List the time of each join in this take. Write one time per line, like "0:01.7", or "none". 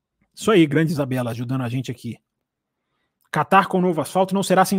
none

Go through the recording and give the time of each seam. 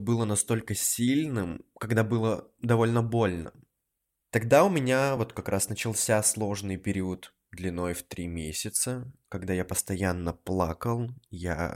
none

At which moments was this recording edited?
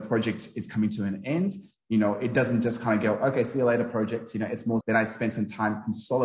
0:04.8

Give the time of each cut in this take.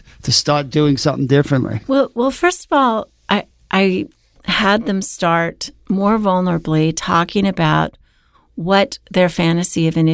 none

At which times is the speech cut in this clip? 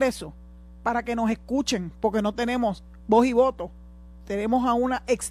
none

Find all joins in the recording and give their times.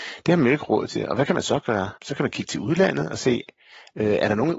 0:02.0

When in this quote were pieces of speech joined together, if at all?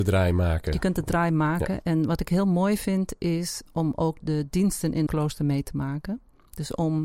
0:03.7
0:04.2
0:05.1

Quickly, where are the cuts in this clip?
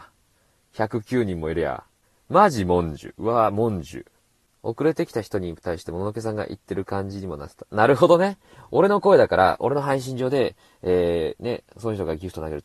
none

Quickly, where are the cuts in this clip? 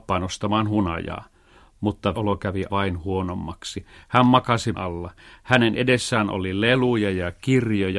0:02.1
0:02.7
0:04.7

